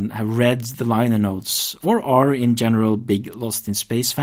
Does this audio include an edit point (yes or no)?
no